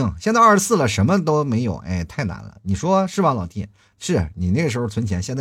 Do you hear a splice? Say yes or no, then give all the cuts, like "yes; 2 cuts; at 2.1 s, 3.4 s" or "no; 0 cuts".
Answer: no; 0 cuts